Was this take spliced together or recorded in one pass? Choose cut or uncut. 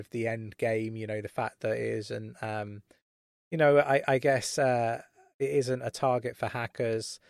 uncut